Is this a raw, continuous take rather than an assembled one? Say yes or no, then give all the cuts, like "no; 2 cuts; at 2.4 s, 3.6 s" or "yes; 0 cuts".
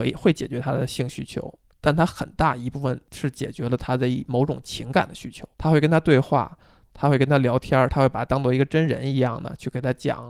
no; 1 cut; at 5.5 s